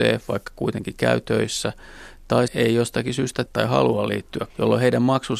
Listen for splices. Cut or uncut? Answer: cut